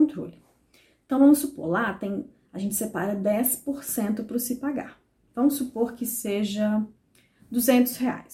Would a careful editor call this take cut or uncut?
uncut